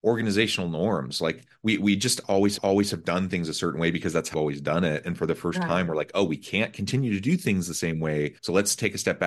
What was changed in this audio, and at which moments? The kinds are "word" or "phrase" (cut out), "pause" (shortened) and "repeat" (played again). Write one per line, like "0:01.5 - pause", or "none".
0:02.6 - repeat
0:04.3 - word
0:08.4 - pause